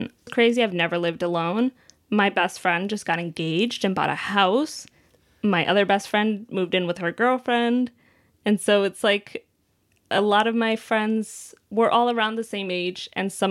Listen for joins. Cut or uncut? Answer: uncut